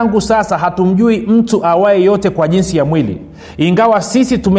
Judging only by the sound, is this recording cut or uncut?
uncut